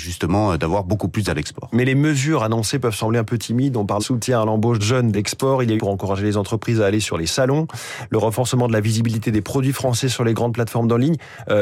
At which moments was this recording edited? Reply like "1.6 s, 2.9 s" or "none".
1.3 s, 4.0 s, 4.8 s, 5.1 s, 5.8 s